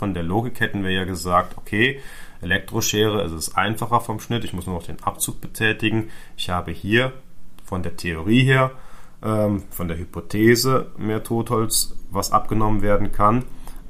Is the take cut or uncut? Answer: uncut